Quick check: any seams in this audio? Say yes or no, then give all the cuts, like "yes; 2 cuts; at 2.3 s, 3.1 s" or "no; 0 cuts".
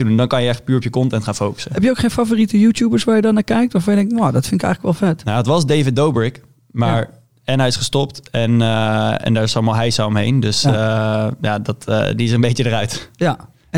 no; 0 cuts